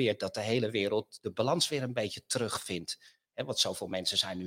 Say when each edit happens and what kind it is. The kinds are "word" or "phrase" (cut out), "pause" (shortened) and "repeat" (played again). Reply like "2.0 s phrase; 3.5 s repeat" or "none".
none